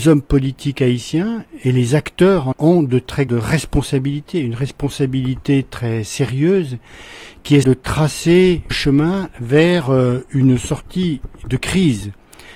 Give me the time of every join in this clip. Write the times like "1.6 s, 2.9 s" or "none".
2.5 s, 3.3 s, 7.6 s, 8.7 s